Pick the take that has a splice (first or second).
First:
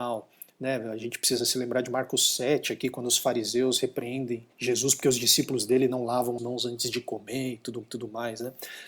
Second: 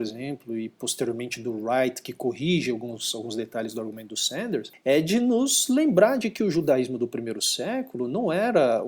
first